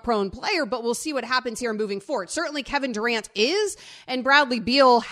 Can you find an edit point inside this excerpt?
no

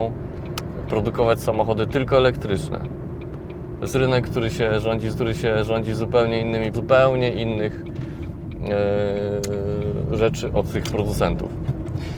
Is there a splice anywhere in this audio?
yes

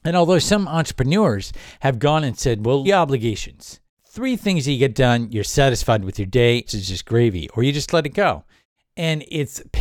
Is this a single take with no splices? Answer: no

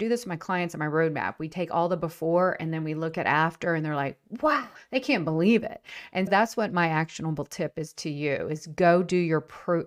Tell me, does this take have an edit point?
yes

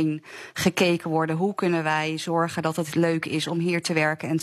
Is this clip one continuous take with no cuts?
yes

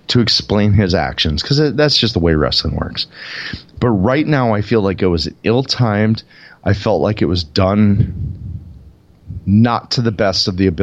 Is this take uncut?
yes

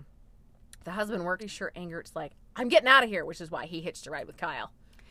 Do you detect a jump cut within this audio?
yes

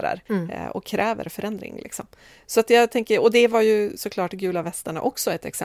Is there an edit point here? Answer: no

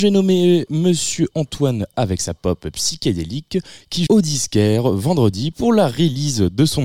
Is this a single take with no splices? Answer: no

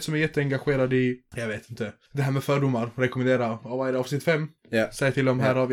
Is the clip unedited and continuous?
no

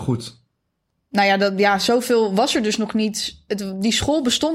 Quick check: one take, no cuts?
yes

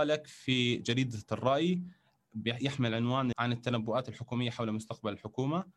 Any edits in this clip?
yes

